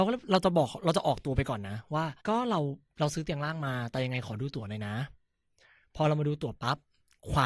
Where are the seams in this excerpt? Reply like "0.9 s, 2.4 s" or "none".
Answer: 2.2 s